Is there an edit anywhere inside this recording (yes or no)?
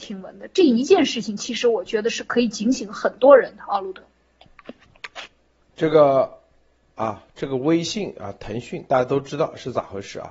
no